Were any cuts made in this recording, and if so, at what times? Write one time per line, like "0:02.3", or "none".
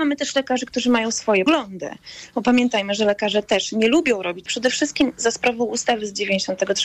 0:01.5
0:04.5